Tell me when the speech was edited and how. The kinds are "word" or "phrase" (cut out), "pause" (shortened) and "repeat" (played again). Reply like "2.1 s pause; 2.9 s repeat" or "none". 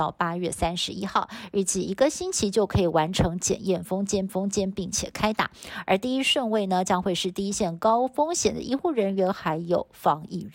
4.3 s repeat